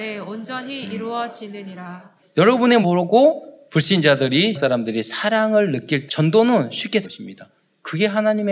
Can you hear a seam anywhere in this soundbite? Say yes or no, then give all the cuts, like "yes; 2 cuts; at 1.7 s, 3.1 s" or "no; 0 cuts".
yes; 5 cuts; at 2.2 s, 2.8 s, 4.5 s, 6.1 s, 7.0 s